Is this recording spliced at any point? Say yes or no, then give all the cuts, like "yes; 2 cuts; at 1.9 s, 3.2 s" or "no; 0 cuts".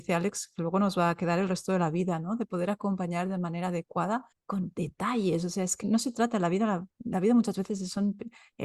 yes; 2 cuts; at 4.3 s, 5.8 s